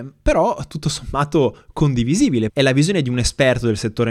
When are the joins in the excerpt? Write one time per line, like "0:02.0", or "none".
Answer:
0:02.5

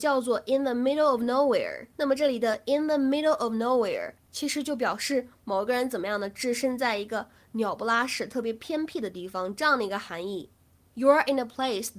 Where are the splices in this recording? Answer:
none

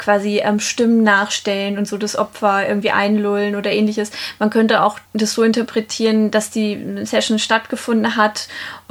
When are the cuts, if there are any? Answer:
0:05.1

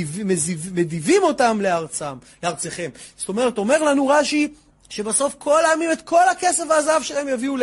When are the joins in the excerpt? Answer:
0:04.7

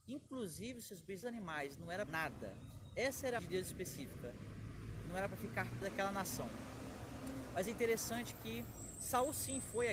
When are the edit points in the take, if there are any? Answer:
0:01.2
0:02.1
0:03.4
0:05.8

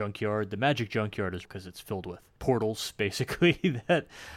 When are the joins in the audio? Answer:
0:01.4
0:02.4

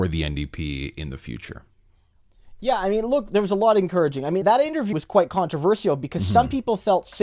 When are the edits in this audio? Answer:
0:04.4
0:04.9

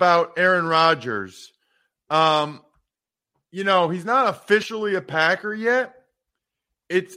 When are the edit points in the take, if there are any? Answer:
none

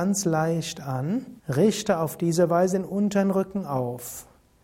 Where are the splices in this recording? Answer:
0:01.4

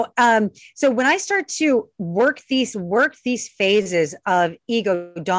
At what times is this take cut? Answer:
0:02.7

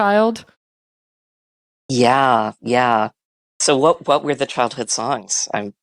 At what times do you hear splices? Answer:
none

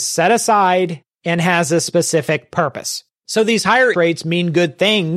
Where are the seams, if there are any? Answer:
0:03.9

